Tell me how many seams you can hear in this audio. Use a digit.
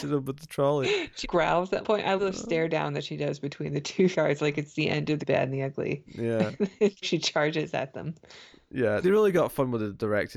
7